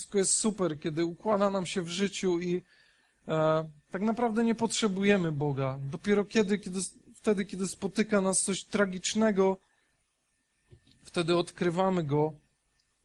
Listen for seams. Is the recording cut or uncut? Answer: uncut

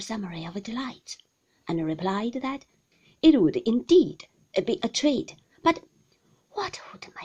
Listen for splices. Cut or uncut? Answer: uncut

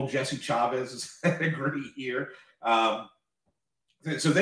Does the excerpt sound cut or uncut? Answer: uncut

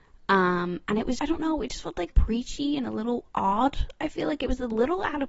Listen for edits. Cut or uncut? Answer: cut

